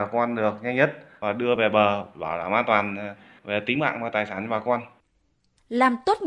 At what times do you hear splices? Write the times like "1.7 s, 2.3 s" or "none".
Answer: none